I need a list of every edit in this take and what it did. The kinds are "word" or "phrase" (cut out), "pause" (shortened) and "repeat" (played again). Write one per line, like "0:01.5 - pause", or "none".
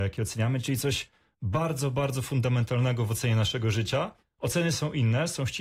0:04.2 - pause

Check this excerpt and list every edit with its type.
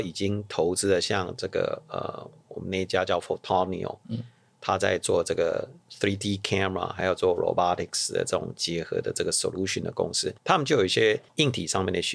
0:10.4 - pause

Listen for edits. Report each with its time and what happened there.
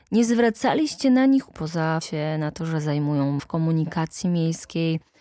0:01.5 - word
0:02.0 - word
0:03.4 - word

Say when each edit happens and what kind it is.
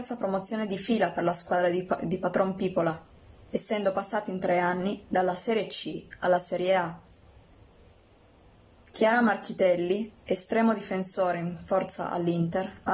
none

